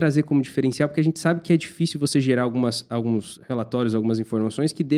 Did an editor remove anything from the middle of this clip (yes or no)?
no